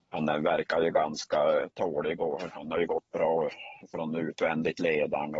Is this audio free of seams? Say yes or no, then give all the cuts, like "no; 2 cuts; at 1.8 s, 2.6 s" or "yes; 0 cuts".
yes; 0 cuts